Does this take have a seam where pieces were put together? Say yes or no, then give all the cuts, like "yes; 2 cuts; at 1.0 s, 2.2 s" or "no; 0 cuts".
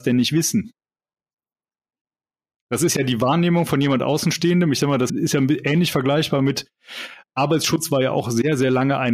yes; 1 cut; at 5.1 s